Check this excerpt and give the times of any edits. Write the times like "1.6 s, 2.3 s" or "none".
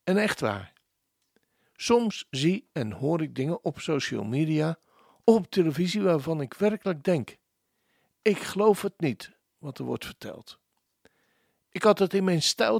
none